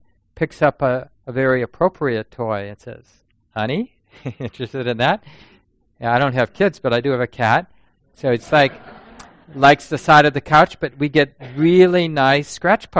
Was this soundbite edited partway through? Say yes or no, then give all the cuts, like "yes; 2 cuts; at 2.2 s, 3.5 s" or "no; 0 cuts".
no; 0 cuts